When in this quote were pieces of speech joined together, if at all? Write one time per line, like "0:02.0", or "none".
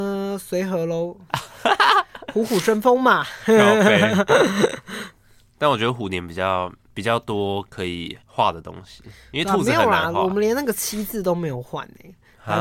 0:06.9
0:08.2

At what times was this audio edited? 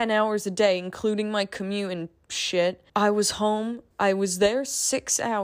0:02.9
0:03.9

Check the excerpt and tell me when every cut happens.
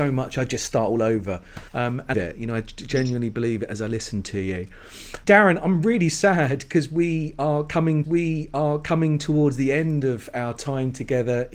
0:01.7
0:02.1
0:05.2
0:08.0

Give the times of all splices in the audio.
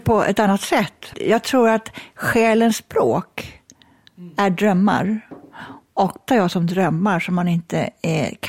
0:01.1
0:06.3

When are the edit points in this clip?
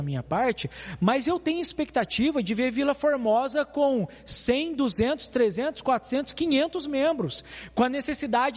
none

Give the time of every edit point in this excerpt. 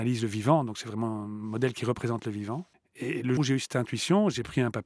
0:03.4

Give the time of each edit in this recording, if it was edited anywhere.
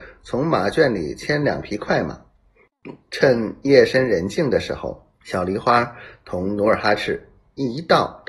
0:03.0
0:05.1

